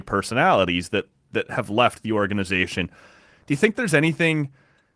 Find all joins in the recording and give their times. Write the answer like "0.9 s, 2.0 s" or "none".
none